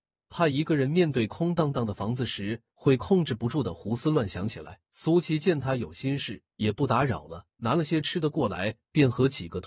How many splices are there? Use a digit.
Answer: 3